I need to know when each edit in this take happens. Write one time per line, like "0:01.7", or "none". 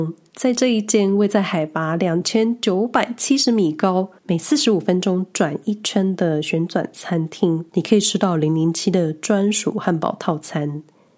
0:04.2
0:07.7